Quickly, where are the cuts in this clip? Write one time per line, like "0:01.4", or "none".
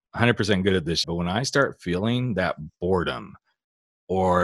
0:01.0